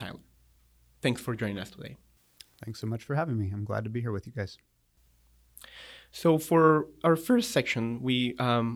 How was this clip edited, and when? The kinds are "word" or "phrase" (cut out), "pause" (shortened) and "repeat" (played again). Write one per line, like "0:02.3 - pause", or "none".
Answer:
none